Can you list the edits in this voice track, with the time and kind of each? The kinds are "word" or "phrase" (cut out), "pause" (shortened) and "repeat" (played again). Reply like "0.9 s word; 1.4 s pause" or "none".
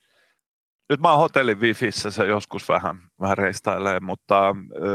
3.1 s pause